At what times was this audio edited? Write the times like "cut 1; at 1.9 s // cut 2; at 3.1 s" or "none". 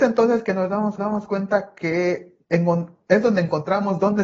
cut 1; at 1.0 s